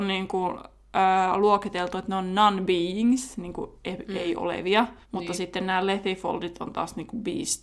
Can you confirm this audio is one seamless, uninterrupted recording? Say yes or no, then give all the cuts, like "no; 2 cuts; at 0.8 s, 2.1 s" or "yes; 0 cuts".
no; 1 cut; at 5.0 s